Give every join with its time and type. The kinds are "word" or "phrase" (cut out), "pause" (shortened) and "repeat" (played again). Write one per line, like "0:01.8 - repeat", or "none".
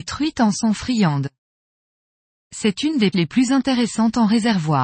0:03.1 - word